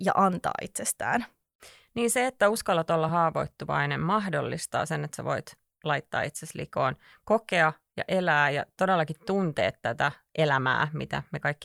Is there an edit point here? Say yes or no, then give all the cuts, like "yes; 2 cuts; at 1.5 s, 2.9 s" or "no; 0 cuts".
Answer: no; 0 cuts